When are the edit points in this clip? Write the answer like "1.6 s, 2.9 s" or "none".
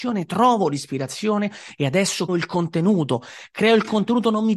2.3 s